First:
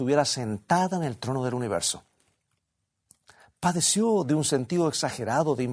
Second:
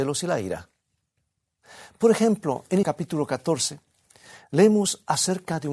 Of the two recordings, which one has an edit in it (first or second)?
second